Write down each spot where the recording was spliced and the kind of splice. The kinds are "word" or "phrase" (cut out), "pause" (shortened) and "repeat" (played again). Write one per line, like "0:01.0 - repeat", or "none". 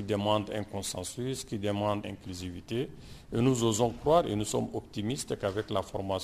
0:02.0 - word